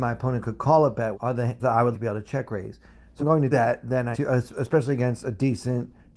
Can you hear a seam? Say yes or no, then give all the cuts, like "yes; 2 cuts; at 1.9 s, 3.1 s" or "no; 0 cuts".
yes; 6 cuts; at 1.1 s, 1.6 s, 1.9 s, 3.2 s, 3.5 s, 4.1 s